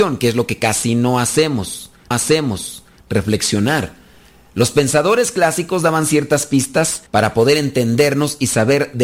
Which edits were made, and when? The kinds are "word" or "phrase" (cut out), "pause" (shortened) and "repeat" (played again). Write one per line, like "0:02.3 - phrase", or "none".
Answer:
0:02.1 - repeat
0:07.1 - pause